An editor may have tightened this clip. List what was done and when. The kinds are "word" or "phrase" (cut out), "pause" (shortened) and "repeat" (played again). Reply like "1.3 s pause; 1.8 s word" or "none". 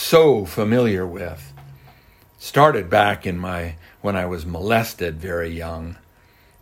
none